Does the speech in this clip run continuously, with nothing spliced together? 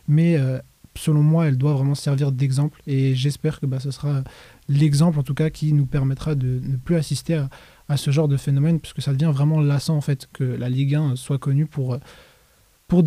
yes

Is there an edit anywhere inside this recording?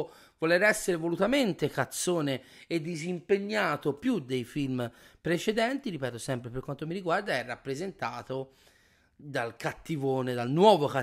no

